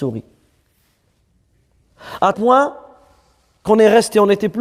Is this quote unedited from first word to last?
no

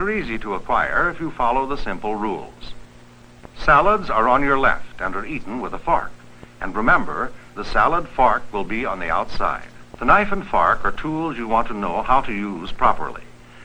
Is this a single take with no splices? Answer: no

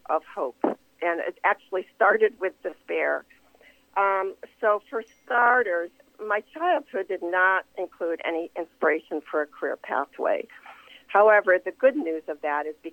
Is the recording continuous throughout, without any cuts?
yes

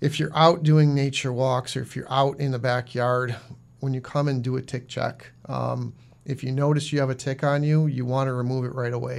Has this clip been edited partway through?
no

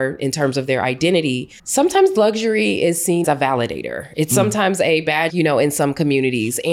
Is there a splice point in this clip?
yes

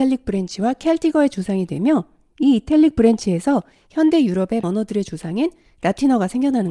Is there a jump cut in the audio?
yes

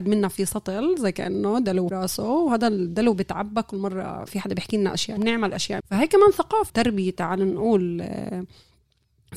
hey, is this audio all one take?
no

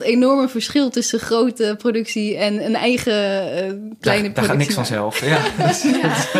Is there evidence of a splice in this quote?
no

